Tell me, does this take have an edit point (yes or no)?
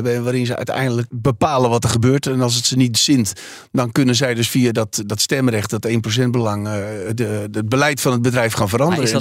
yes